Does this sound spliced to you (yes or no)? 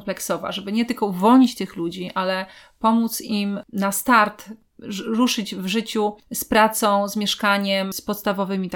no